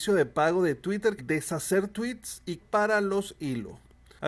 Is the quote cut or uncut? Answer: cut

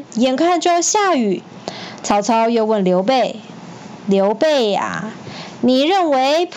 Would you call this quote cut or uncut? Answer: uncut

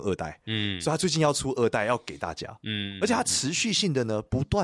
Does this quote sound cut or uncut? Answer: uncut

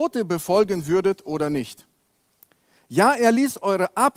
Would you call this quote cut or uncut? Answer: uncut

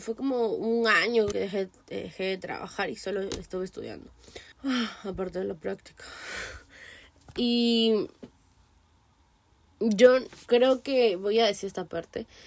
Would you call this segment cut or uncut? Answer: cut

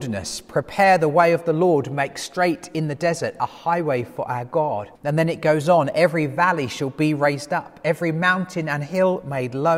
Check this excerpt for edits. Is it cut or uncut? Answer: cut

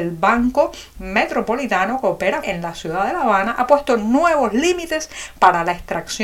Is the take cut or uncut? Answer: cut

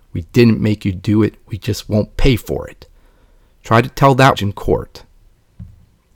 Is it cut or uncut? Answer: cut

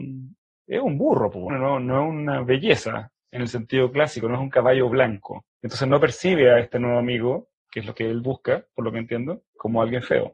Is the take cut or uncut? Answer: cut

